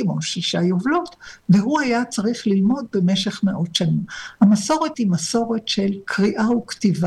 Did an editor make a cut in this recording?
yes; 1 cut; at 4.9 s

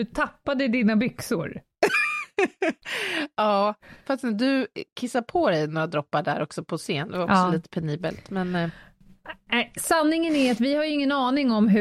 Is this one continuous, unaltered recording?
yes; 0 cuts

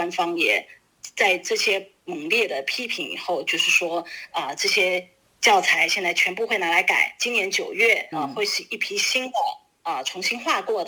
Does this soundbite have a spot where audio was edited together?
yes; 1 cut; at 8.1 s

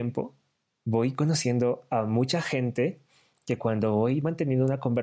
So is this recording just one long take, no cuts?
yes; 0 cuts

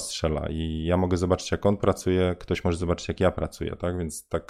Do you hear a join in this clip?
no; 0 cuts

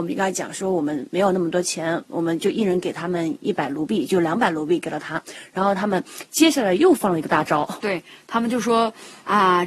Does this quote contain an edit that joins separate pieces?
yes; 1 cut; at 7.8 s

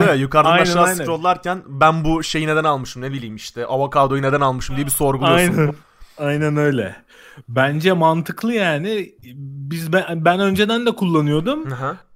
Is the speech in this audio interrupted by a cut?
yes; 1 cut; at 5.8 s

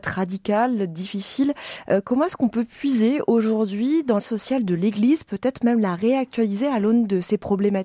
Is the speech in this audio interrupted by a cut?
yes; 1 cut; at 4.2 s

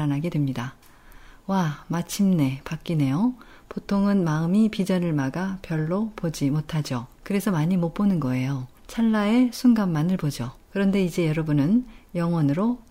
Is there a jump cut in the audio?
yes; 3 cuts; at 7.1 s, 8.8 s, 10.6 s

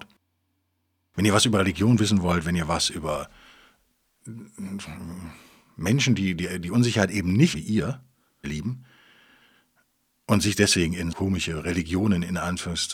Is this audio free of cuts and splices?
no; 3 cuts; at 7.5 s, 8.4 s, 11.1 s

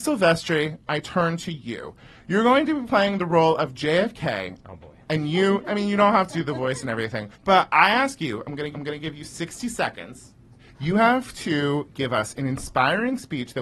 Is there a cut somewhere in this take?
yes; 3 cuts; at 6.3 s, 7.3 s, 8.7 s

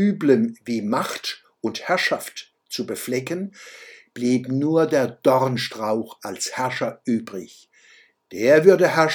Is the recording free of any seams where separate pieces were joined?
yes; 0 cuts

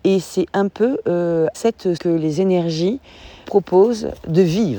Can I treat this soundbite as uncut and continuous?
no; 3 cuts; at 1.5 s, 2.0 s, 3.4 s

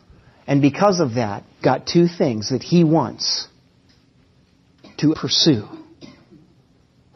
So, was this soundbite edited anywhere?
yes; 2 cuts; at 1.6 s, 5.1 s

